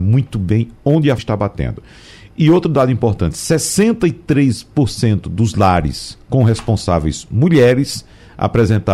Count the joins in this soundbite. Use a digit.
1